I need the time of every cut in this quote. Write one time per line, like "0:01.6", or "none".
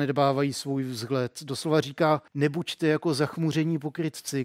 0:02.3